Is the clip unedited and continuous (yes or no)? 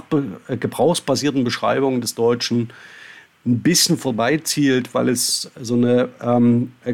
yes